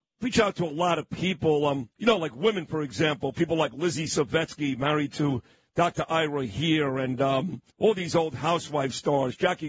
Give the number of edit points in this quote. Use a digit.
2